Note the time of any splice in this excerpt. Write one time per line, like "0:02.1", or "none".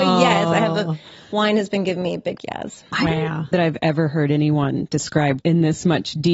0:02.4
0:03.5
0:05.4